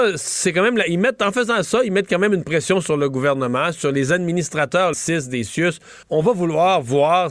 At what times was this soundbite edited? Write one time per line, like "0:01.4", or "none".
0:04.9
0:06.0